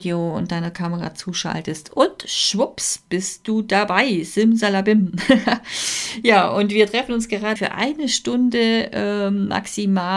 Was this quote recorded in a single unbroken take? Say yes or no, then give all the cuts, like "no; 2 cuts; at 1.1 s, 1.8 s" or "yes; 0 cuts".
no; 1 cut; at 7.6 s